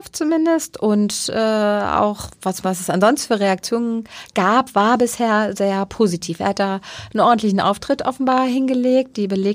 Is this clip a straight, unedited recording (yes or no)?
no